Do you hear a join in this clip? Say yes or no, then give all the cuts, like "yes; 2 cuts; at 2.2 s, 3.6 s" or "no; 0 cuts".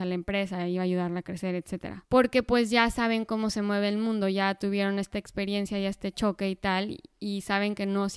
yes; 1 cut; at 2.0 s